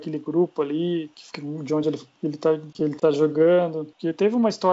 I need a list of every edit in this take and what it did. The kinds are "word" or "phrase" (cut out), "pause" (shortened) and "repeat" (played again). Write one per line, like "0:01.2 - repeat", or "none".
none